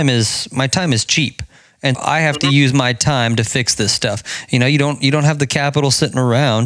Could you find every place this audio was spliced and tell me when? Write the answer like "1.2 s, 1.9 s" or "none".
1.9 s